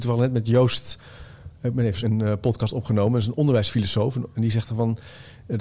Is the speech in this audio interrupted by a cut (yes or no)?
yes